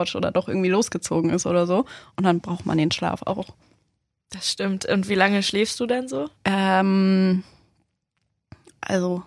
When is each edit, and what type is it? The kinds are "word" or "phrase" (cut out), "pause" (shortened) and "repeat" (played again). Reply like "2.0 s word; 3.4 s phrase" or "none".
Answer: 6.4 s pause